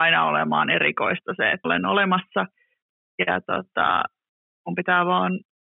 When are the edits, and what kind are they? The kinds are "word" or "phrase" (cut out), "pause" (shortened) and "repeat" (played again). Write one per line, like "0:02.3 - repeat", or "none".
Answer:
0:01.6 - word